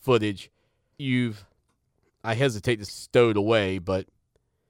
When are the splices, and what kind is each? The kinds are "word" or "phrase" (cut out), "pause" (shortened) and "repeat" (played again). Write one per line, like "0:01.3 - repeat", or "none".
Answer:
0:01.0 - word
0:01.9 - pause
0:02.9 - word